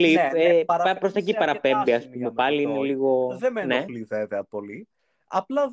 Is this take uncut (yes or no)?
yes